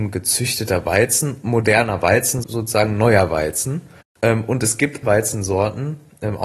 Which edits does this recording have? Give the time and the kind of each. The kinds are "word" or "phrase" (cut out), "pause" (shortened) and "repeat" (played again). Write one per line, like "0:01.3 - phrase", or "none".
0:02.4 - word
0:04.0 - pause
0:05.0 - word